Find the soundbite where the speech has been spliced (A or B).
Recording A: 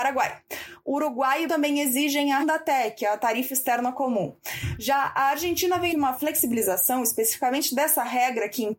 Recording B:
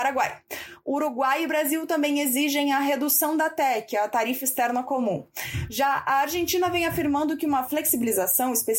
A